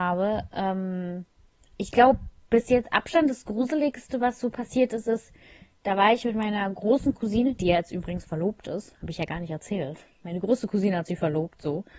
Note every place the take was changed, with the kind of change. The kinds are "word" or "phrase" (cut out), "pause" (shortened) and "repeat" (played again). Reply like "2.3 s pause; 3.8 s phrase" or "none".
none